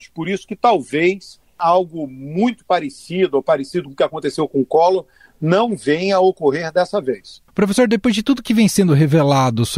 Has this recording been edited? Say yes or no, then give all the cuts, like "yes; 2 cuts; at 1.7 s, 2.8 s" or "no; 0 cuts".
no; 0 cuts